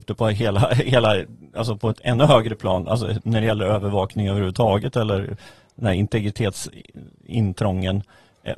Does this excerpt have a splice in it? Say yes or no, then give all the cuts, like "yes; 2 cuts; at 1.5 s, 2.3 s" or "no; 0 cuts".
no; 0 cuts